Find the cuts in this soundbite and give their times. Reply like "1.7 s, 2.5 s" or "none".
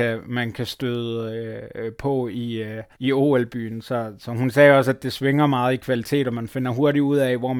2.9 s